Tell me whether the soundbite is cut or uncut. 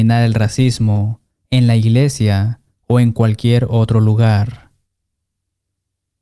uncut